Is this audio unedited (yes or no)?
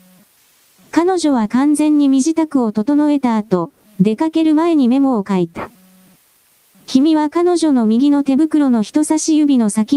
yes